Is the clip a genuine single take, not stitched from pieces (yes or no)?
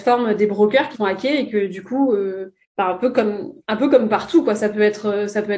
no